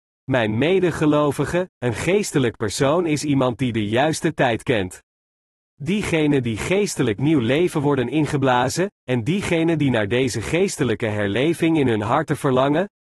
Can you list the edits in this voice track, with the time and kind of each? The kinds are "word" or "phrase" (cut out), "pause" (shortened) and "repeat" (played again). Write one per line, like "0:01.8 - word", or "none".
none